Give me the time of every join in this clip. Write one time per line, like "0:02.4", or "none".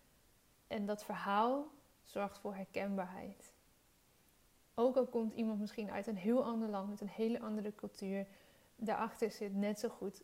none

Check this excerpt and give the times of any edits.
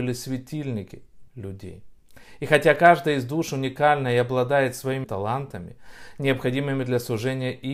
0:01.3
0:05.0

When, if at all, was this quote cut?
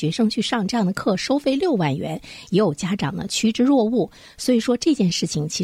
none

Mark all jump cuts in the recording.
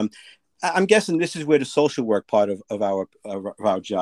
none

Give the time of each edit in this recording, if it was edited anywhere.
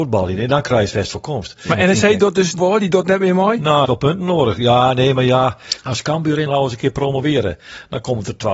0:02.6
0:03.8
0:06.5

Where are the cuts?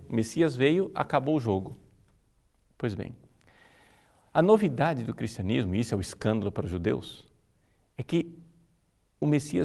none

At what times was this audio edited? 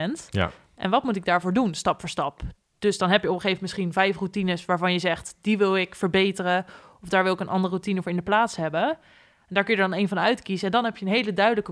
none

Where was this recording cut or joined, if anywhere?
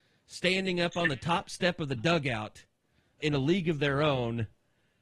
0:03.2

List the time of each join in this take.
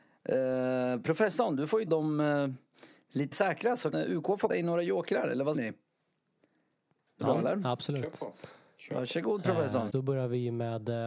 0:01.9
0:03.3
0:03.9
0:04.5
0:05.5
0:07.2
0:09.9

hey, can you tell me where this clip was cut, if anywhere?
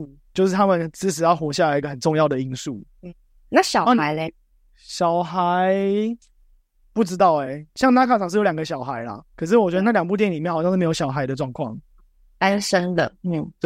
none

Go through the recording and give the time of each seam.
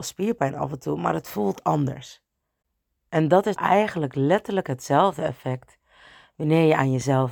0:03.6

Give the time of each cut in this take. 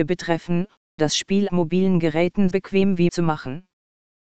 0:01.0
0:01.5
0:02.5
0:03.1

